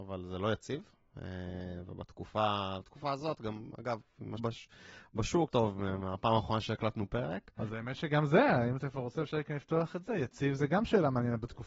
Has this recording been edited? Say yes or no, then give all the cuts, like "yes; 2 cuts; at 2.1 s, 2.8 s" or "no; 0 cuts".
yes; 2 cuts; at 4.4 s, 5.5 s